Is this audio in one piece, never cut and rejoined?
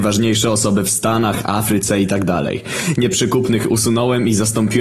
yes; 0 cuts

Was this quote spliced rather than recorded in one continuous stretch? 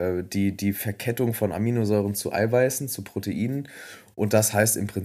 no; 0 cuts

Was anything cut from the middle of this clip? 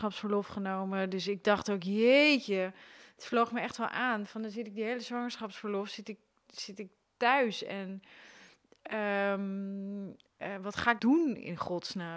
yes; 1 cut; at 11.0 s

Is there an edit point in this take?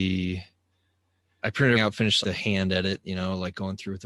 yes; 3 cuts; at 1.4 s, 1.7 s, 2.2 s

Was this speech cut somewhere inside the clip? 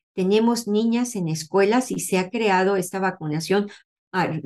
no; 0 cuts

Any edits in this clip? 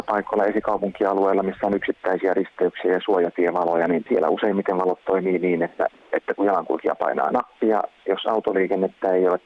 no; 0 cuts

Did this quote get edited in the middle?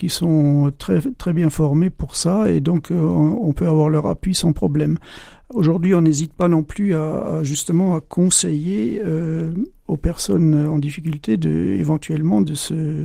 no; 0 cuts

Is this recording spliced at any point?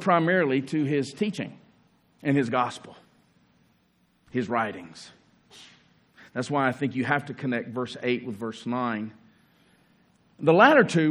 yes; 1 cut; at 1.9 s

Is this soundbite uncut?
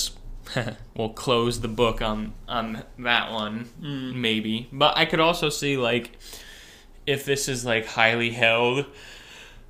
yes; 0 cuts

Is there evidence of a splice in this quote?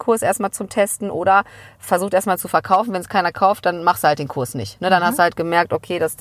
no; 0 cuts

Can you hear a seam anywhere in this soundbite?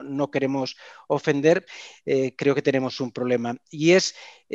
no; 0 cuts

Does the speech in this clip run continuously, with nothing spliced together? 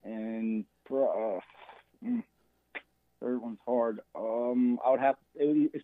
no; 1 cut; at 2.9 s

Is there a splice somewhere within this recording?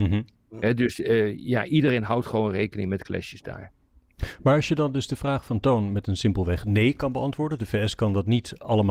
no; 0 cuts

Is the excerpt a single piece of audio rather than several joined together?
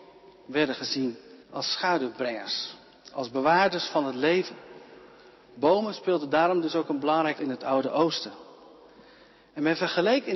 no; 2 cuts; at 1.4 s, 7.4 s

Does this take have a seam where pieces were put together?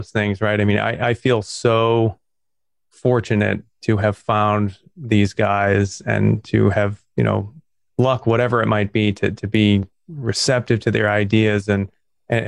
no; 0 cuts

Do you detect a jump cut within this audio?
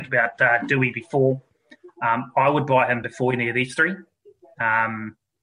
no; 0 cuts

